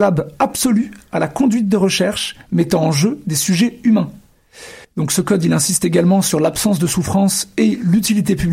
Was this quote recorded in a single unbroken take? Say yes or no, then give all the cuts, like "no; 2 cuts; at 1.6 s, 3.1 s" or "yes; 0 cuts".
no; 1 cut; at 4.8 s